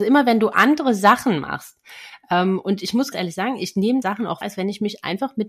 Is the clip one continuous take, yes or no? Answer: no